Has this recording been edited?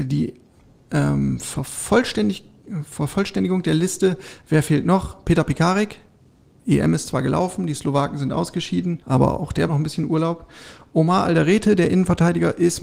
yes; 2 cuts; at 9.0 s, 9.7 s

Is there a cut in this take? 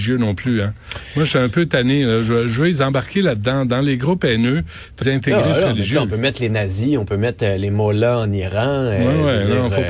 yes; 1 cut; at 5.0 s

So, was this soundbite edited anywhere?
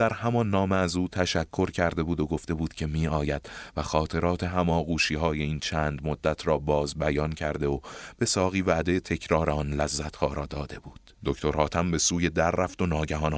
yes; 1 cut; at 11.1 s

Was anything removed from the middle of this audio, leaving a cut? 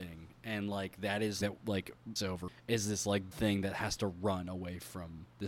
yes; 4 cuts; at 1.4 s, 2.2 s, 2.5 s, 3.3 s

